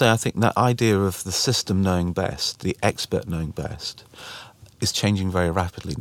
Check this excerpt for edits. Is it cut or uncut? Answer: uncut